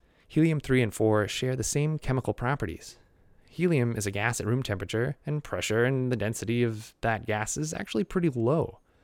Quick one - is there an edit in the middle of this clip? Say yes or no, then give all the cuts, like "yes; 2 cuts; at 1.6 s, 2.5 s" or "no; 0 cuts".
no; 0 cuts